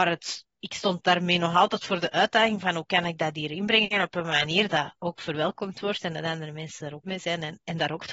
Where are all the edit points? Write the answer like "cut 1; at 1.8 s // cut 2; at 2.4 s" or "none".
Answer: cut 1; at 4.7 s // cut 2; at 7.0 s